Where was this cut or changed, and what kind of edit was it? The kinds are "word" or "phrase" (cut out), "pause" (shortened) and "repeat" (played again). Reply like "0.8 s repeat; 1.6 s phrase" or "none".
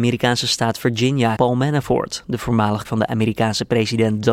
1.4 s word; 2.8 s word